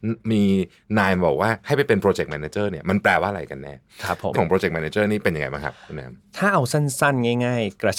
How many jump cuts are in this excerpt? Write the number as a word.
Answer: one